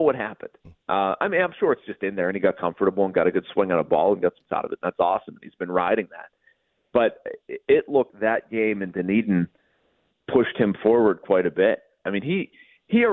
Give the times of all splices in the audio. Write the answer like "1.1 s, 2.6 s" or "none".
4.4 s, 8.1 s, 10.1 s